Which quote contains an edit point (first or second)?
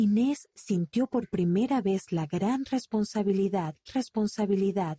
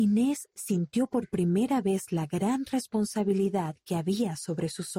first